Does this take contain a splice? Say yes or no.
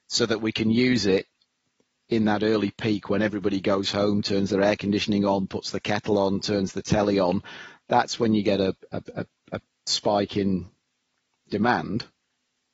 no